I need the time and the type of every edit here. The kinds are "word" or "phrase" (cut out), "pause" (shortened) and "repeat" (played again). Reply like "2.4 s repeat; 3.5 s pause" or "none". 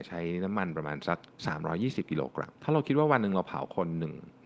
1.3 s pause; 2.6 s pause